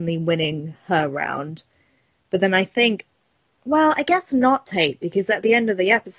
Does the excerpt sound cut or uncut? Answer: cut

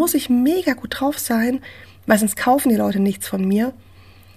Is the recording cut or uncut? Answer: uncut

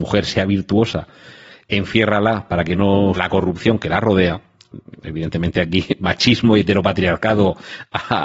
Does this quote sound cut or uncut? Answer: cut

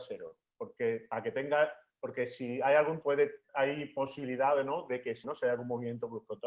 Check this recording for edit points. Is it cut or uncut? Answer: cut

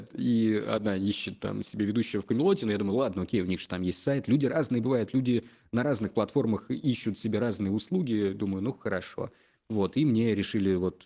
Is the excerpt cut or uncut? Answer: uncut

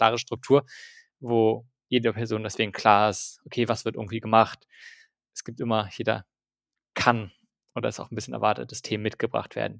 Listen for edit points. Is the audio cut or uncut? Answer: uncut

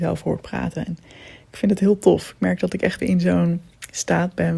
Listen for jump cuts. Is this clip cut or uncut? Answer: cut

